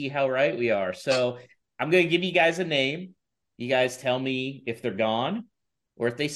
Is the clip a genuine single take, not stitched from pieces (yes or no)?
yes